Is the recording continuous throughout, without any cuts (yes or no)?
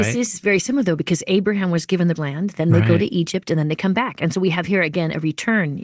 no